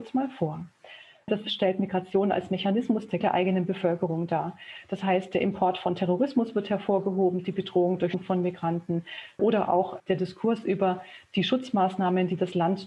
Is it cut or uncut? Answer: cut